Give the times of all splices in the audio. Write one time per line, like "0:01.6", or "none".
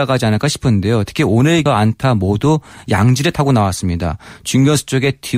0:01.7